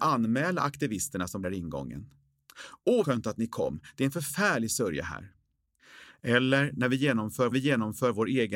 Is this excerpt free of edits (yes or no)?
no